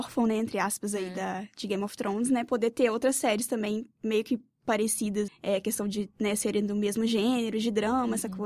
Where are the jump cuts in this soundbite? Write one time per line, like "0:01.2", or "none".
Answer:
0:05.3